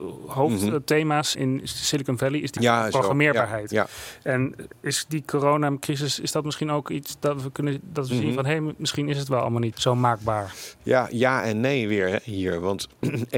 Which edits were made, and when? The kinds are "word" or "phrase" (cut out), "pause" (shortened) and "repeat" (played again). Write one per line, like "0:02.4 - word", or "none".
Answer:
0:01.3 - word
0:02.6 - word
0:04.7 - word
0:09.7 - word